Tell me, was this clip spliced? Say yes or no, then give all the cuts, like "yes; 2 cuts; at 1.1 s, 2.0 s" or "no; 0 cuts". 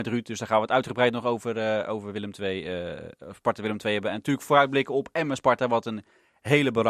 no; 0 cuts